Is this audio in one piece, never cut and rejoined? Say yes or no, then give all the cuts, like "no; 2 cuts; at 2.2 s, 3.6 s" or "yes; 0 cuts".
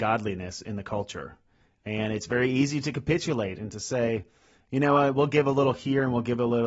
yes; 0 cuts